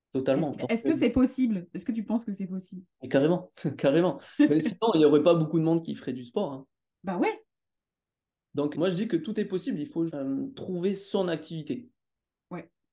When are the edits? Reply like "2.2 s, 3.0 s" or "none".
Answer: 2.9 s, 8.7 s, 10.1 s

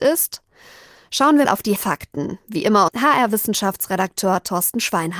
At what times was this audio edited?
1.4 s, 1.8 s, 2.9 s

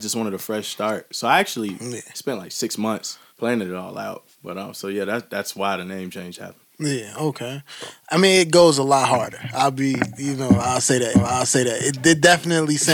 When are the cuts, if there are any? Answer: 3.3 s, 4.3 s, 11.1 s

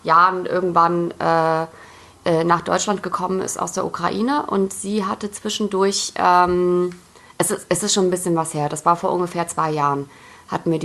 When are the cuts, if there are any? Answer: none

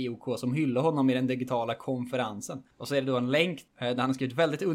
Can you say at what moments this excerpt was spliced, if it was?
2.7 s, 3.7 s

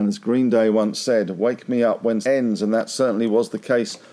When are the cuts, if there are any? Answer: 2.2 s

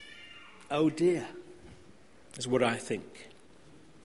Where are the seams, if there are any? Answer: 1.9 s

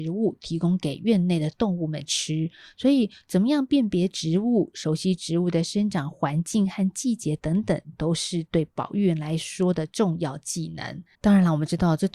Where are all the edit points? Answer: 11.1 s

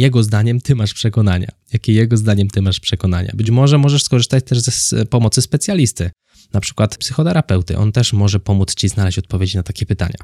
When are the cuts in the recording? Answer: none

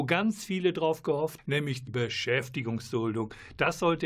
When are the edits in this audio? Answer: 1.4 s, 1.9 s

